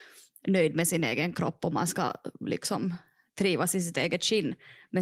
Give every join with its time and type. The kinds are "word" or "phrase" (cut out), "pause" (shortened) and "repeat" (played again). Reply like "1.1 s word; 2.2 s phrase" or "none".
none